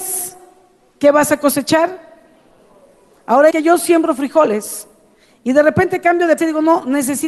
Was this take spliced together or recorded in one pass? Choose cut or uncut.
cut